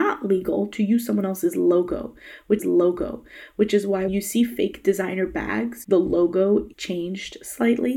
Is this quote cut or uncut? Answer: cut